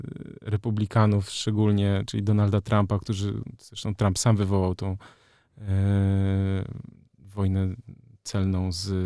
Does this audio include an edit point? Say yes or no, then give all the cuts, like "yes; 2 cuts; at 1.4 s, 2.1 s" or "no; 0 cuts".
no; 0 cuts